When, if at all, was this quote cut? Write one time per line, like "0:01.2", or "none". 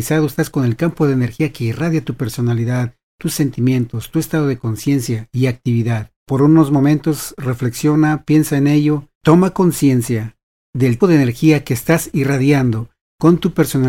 0:06.2
0:09.1
0:11.0